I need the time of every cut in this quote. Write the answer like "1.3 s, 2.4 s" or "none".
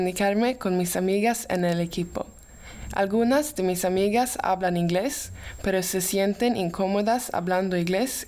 none